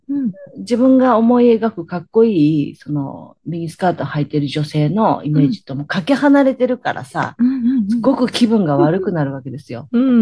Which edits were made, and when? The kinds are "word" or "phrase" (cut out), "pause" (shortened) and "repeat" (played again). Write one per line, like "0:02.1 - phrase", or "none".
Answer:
none

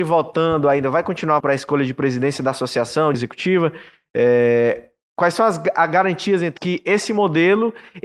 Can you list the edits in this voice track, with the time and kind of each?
0:01.4 - word
0:03.1 - word
0:06.6 - word

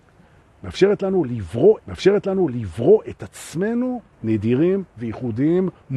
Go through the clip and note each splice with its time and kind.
0:01.8 - repeat
0:04.1 - word

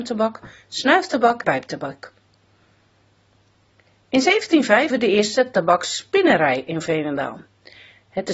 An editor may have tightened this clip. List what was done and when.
0:01.4 - word
0:04.9 - word

